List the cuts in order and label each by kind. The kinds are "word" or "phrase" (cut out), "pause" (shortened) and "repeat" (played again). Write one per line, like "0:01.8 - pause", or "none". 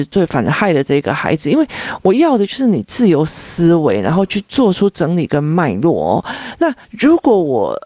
0:06.8 - pause